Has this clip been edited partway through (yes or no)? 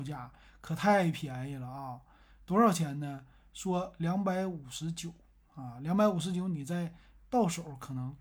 no